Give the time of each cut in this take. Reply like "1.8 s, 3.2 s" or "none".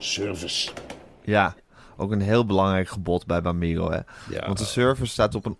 none